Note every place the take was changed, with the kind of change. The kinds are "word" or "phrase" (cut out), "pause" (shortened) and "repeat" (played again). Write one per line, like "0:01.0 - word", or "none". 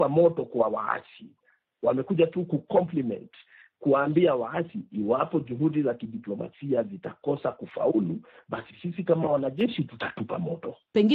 none

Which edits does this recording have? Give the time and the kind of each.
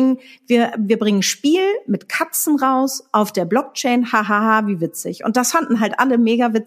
none

